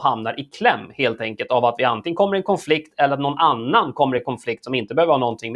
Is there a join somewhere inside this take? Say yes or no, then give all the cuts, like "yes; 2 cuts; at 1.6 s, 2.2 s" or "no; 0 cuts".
no; 0 cuts